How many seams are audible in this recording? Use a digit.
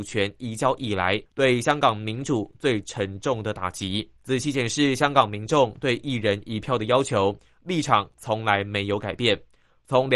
2